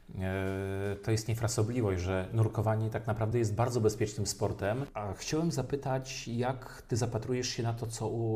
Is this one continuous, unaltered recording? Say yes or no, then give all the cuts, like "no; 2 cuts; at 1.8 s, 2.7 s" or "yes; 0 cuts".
yes; 0 cuts